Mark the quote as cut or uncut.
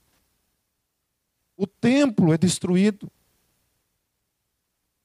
uncut